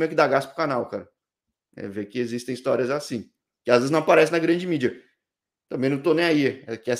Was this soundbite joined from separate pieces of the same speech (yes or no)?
no